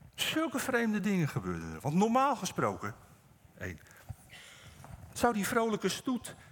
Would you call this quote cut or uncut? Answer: uncut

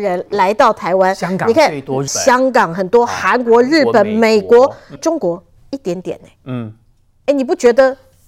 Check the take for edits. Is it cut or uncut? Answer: cut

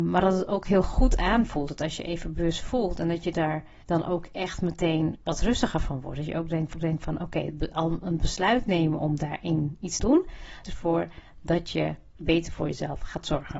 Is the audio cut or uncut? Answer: cut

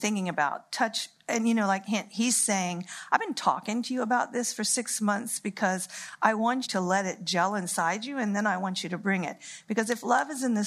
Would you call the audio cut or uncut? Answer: cut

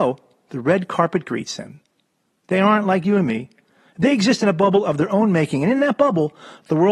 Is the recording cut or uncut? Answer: uncut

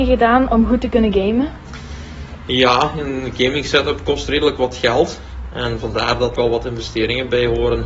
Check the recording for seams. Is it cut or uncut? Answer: cut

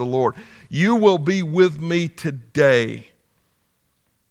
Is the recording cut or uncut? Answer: uncut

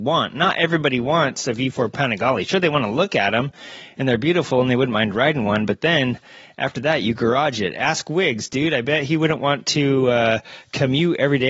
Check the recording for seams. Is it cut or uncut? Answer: uncut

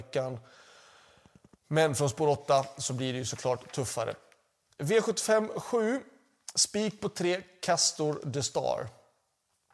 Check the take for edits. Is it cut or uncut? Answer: uncut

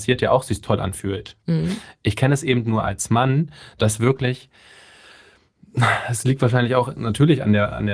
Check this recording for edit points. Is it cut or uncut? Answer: uncut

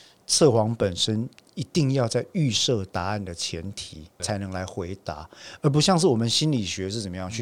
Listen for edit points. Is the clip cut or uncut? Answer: cut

